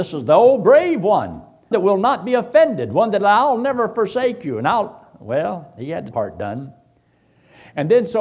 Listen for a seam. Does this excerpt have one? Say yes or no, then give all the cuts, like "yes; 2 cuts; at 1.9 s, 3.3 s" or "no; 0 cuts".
yes; 2 cuts; at 1.7 s, 6.1 s